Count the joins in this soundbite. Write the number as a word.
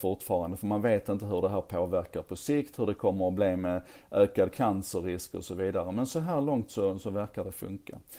zero